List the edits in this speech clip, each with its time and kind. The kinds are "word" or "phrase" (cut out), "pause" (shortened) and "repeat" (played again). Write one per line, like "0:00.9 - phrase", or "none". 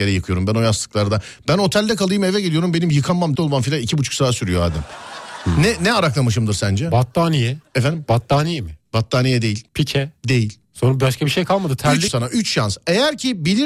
0:03.3 - word
0:07.7 - pause
0:09.7 - pause
0:10.6 - pause
0:12.1 - phrase